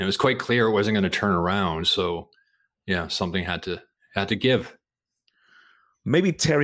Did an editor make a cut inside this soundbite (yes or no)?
no